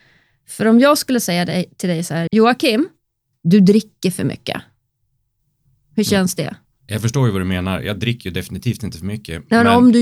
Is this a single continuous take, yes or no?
no